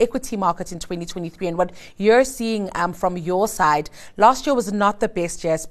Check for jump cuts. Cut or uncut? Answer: uncut